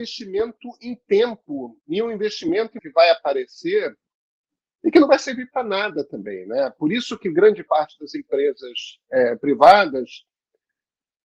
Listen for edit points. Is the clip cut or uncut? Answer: cut